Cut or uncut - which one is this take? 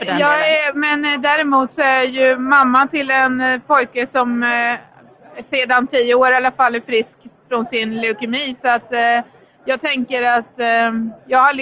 uncut